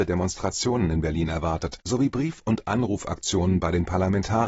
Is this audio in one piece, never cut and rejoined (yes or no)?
no